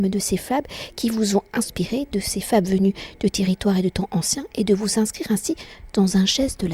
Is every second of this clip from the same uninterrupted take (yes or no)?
yes